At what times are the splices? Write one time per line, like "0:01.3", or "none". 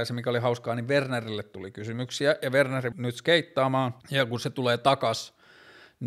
0:02.9
0:04.0